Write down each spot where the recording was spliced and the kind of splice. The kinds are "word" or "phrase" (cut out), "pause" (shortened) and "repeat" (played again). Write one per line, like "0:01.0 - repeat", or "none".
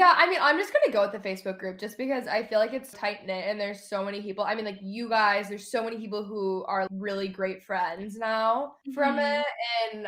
0:02.9 - word
0:06.9 - word
0:08.8 - pause